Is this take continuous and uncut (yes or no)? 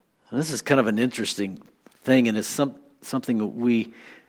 yes